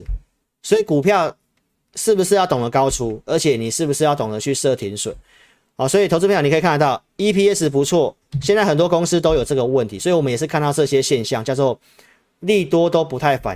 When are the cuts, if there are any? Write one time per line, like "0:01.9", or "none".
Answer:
none